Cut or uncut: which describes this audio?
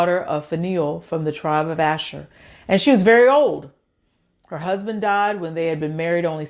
uncut